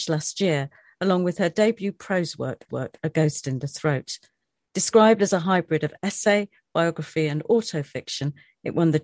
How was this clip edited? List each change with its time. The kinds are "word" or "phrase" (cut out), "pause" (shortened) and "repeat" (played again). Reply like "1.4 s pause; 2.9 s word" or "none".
2.7 s repeat

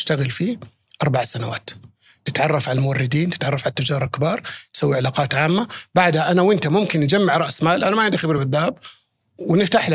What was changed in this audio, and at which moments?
none

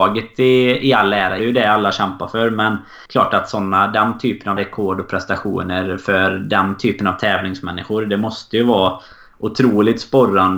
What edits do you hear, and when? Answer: 1.4 s phrase; 3.1 s pause; 4.6 s word

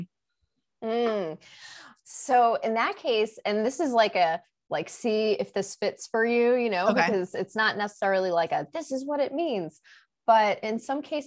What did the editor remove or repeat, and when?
none

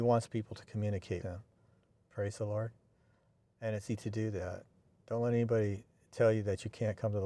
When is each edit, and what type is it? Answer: 1.2 s word; 3.9 s word

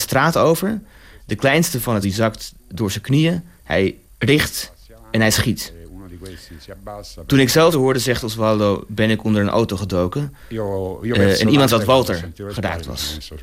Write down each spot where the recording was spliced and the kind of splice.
2.0 s word; 4.1 s pause; 7.7 s word; 11.7 s word

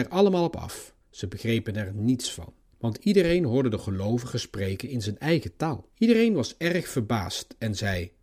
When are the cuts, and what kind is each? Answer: 1.0 s pause; 2.7 s pause; 5.9 s pause

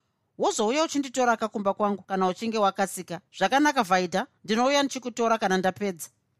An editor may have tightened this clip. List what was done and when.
3.3 s pause; 4.4 s pause

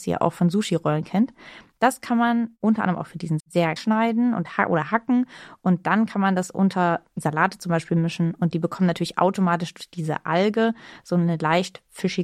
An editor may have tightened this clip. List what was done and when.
3.4 s word; 3.8 s word

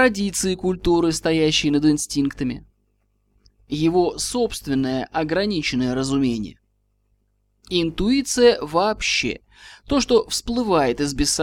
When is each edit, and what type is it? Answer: none

